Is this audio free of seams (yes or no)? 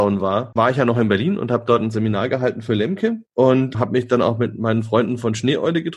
yes